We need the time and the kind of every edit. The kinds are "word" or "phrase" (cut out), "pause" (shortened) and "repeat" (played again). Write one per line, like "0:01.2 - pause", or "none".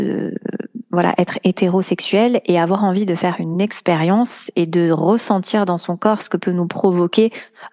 none

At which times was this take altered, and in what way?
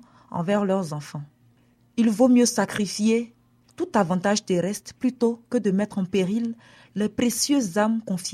none

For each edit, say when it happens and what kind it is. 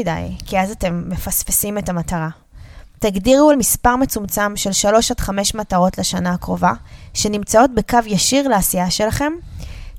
0:03.5 - word

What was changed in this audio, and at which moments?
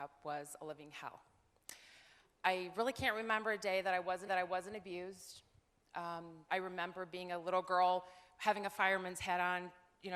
0:04.3 - repeat
0:06.5 - word

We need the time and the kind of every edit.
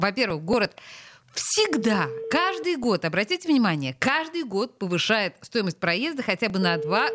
none

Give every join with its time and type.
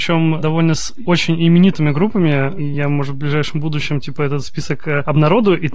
none

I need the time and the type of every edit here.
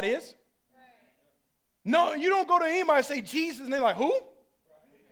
none

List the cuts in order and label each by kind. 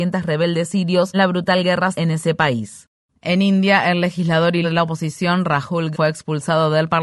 0:01.1 - word
0:01.9 - word
0:04.6 - word
0:05.9 - word

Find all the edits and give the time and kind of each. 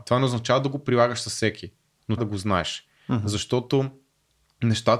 0:02.2 - word

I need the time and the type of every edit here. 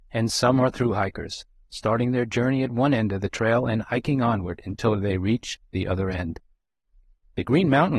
none

